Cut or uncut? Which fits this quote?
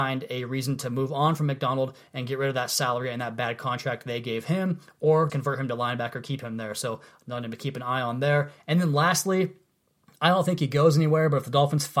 cut